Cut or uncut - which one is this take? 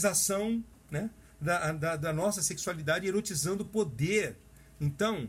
uncut